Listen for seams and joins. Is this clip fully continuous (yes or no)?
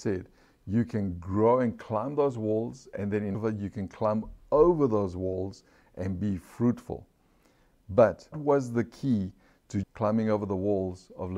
no